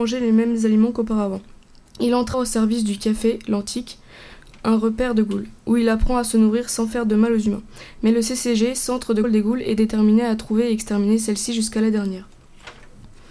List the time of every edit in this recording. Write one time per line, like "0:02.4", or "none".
0:02.3
0:09.2